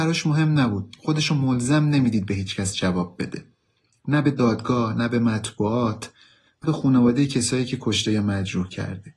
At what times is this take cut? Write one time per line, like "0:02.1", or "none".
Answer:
0:06.6